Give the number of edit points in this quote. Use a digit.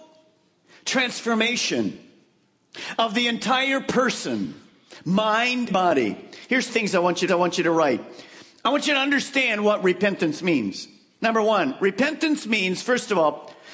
3